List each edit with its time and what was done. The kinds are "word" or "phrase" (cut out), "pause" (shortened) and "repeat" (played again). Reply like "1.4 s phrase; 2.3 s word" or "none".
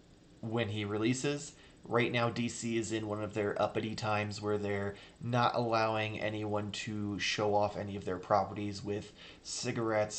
none